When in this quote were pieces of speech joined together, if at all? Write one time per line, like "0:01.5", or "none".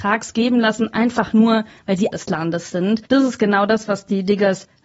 0:02.1
0:03.0